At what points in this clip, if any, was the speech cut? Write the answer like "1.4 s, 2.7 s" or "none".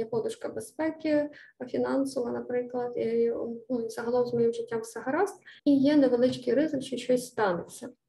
5.6 s